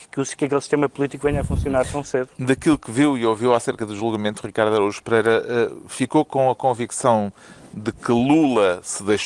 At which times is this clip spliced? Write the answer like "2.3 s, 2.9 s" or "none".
none